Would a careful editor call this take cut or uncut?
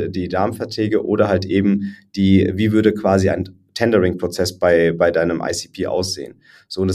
uncut